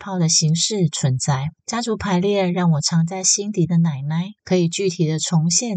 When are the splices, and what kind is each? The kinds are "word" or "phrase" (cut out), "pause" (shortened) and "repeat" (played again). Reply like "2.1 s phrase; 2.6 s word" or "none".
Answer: 1.6 s pause; 4.4 s pause